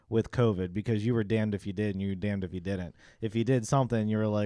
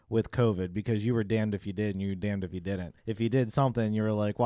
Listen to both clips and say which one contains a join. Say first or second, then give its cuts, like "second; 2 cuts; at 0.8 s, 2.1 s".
second; 1 cut; at 3.0 s